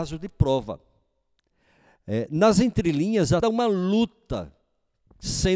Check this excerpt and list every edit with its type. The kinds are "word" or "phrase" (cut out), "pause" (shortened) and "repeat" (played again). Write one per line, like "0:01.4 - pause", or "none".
0:03.4 - word